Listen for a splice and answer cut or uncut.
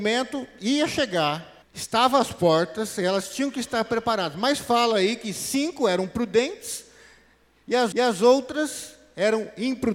cut